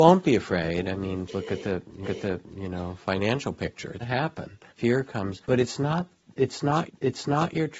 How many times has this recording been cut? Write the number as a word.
six